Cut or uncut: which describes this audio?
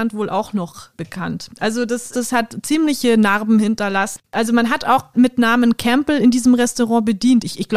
cut